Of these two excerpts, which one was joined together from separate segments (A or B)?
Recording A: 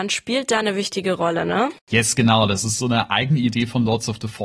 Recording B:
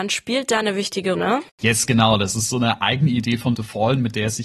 B